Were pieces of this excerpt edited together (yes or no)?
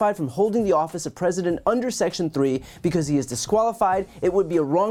no